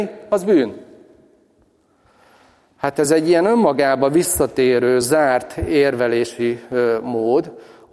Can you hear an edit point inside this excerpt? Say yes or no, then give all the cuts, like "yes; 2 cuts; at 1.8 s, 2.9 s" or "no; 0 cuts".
no; 0 cuts